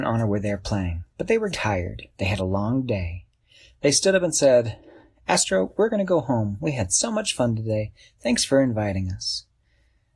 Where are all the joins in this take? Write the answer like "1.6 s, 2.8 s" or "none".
1.5 s, 2.4 s